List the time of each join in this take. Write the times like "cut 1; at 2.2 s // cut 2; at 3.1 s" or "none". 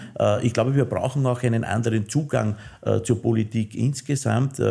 none